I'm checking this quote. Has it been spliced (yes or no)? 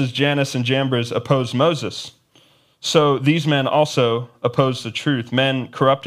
no